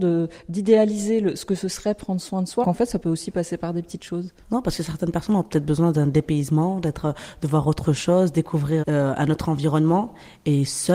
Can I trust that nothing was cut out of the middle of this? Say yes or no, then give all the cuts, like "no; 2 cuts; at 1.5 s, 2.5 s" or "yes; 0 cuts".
no; 3 cuts; at 2.6 s, 4.4 s, 8.8 s